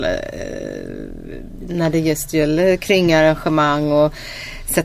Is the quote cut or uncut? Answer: uncut